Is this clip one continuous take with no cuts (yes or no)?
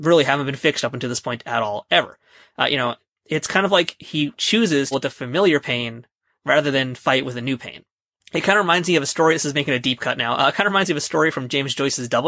no